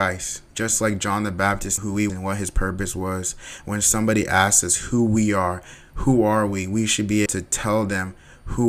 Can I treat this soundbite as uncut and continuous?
no; 3 cuts; at 1.8 s, 2.1 s, 7.3 s

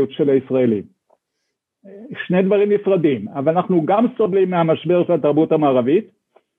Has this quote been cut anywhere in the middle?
no; 0 cuts

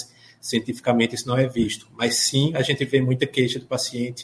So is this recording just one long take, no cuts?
yes; 0 cuts

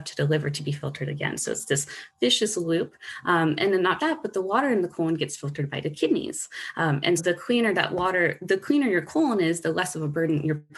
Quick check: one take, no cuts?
no; 2 cuts; at 4.0 s, 7.2 s

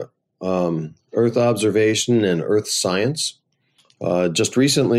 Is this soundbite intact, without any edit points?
yes; 0 cuts

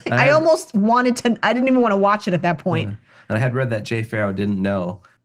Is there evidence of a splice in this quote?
no; 0 cuts

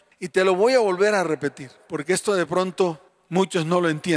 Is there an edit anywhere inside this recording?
no; 0 cuts

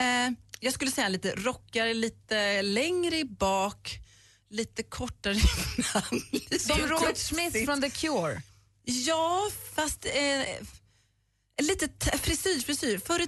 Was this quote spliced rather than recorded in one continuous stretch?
no; 0 cuts

